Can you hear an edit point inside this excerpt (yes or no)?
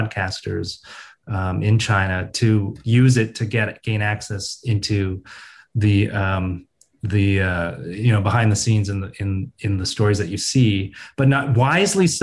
no